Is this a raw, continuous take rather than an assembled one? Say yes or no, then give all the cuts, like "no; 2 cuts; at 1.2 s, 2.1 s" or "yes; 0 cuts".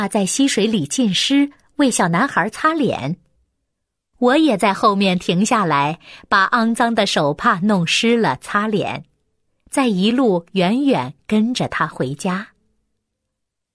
yes; 0 cuts